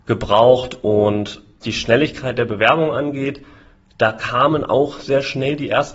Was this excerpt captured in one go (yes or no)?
no